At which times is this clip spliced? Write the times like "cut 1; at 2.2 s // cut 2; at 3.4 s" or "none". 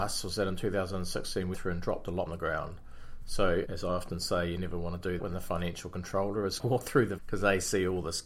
cut 1; at 1.5 s // cut 2; at 2.3 s // cut 3; at 3.7 s // cut 4; at 5.2 s // cut 5; at 6.6 s // cut 6; at 7.2 s